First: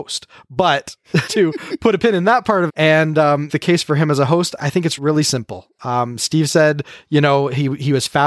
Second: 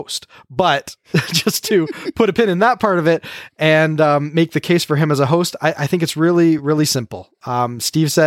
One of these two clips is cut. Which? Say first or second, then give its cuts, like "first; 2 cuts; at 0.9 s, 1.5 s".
first; 5 cuts; at 1.3 s, 2.7 s, 3.5 s, 4.6 s, 5.0 s